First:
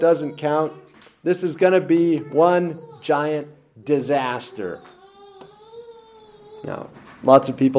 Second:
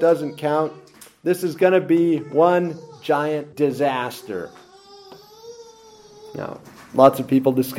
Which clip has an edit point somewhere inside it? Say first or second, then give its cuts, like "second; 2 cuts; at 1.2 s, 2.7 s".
second; 1 cut; at 3.5 s